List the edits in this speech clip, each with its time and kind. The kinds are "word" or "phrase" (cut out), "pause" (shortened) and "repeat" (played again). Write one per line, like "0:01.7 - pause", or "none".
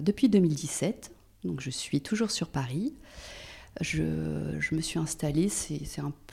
none